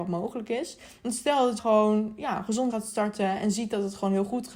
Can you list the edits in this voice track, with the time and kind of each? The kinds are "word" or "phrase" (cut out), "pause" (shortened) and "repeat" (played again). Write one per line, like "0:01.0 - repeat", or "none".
0:01.6 - word
0:02.7 - word